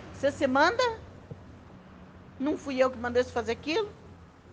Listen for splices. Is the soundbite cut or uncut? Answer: uncut